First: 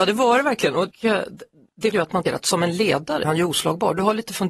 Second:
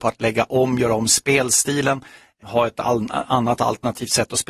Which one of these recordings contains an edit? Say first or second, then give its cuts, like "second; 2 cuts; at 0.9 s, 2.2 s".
first; 3 cuts; at 1.9 s, 2.3 s, 3.2 s